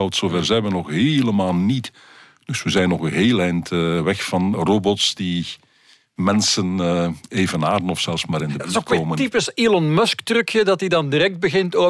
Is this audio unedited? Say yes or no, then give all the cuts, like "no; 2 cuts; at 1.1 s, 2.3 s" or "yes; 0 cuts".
yes; 0 cuts